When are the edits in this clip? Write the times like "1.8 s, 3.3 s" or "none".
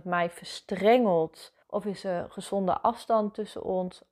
1.6 s